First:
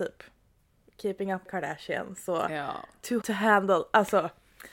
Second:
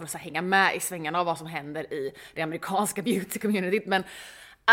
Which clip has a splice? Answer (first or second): first